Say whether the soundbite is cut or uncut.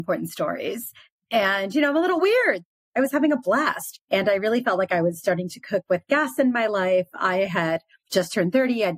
uncut